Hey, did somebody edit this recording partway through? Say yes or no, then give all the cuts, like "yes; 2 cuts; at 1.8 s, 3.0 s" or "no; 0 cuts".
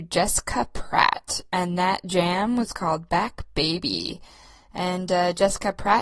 no; 0 cuts